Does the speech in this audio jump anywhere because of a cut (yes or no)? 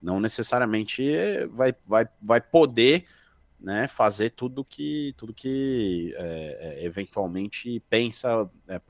no